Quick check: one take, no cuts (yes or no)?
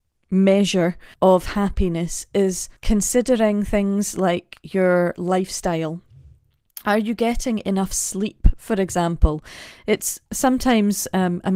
no